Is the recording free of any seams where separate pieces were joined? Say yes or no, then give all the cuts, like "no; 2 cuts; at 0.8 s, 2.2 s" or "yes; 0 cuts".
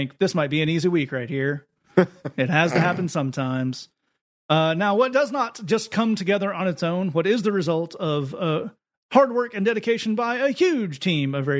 yes; 0 cuts